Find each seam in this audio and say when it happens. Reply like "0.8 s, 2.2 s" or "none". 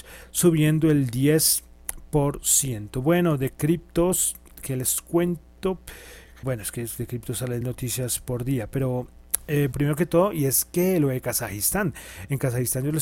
6.4 s, 7.6 s, 9.7 s